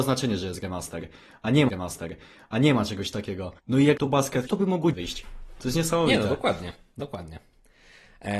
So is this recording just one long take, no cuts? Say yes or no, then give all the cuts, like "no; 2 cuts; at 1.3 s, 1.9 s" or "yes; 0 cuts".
no; 5 cuts; at 1.7 s, 3.6 s, 4.0 s, 4.5 s, 4.9 s